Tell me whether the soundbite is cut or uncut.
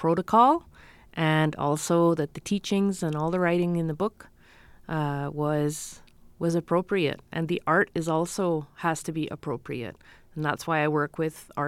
uncut